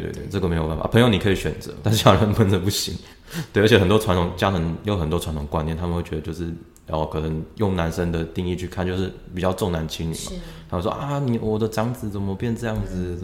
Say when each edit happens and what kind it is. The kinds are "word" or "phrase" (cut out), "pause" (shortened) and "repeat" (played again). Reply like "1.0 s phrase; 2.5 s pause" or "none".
1.8 s word